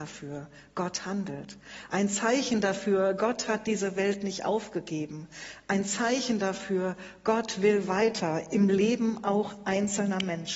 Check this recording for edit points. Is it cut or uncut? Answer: uncut